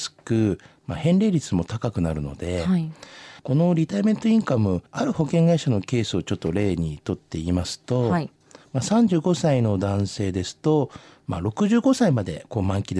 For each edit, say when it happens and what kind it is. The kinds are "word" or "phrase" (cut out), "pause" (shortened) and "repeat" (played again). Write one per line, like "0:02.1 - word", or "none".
0:03.4 - pause
0:04.9 - pause